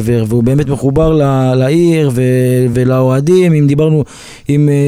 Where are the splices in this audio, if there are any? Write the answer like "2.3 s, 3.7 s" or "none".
none